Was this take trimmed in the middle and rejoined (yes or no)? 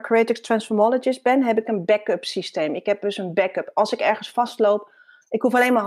no